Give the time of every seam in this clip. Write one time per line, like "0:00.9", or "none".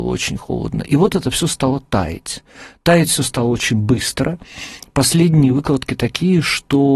none